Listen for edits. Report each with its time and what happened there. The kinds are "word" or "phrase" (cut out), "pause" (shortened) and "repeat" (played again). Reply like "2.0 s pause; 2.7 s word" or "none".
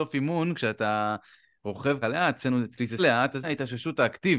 2.0 s word; 3.0 s word; 3.4 s word